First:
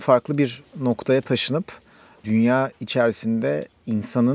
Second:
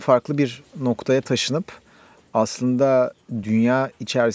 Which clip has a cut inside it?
first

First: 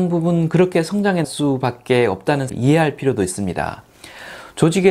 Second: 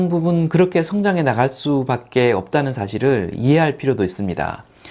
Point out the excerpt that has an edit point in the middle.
first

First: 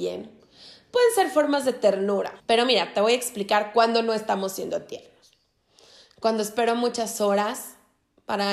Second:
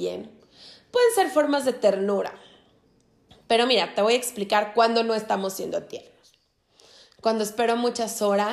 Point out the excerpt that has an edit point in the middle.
first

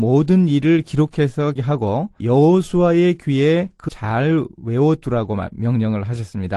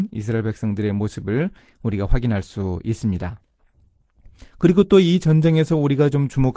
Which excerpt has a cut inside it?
first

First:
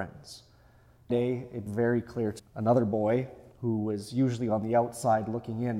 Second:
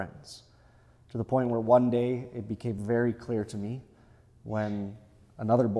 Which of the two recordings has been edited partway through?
first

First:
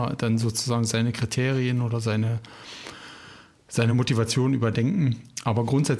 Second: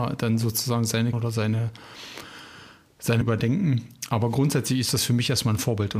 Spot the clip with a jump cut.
second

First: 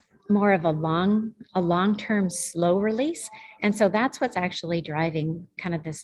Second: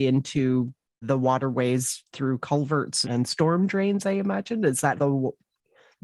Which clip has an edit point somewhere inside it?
second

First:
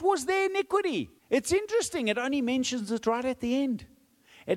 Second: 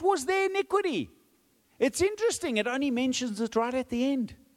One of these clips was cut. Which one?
first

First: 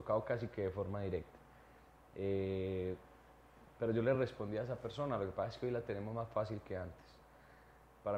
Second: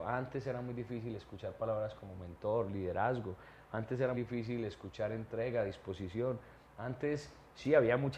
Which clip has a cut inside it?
second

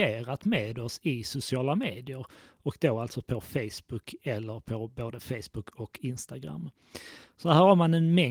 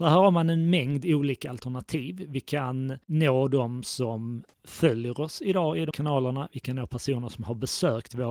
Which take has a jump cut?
second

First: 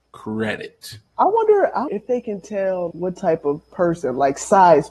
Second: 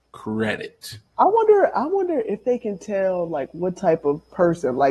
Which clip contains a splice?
first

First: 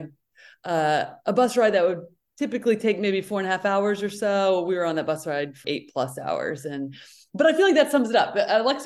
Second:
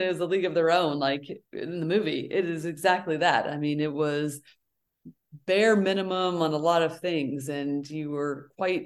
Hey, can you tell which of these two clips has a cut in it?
first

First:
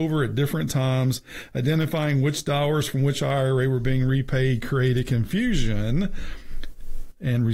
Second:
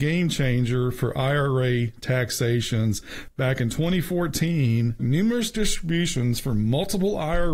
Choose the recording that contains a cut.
second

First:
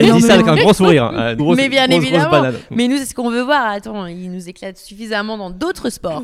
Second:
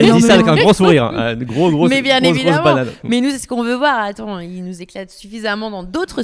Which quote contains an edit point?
first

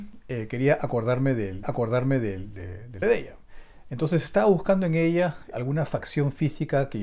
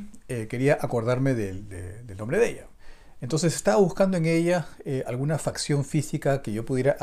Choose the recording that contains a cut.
first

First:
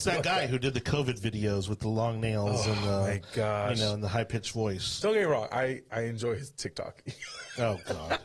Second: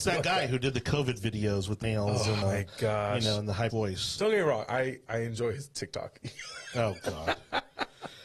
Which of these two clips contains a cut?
second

